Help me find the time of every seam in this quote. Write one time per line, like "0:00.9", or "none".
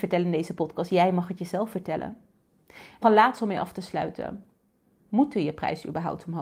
0:03.0